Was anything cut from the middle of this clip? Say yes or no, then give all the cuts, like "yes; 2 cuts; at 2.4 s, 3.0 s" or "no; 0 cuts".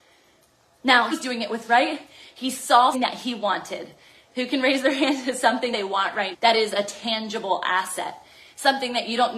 yes; 5 cuts; at 1.1 s, 1.7 s, 2.9 s, 5.7 s, 6.3 s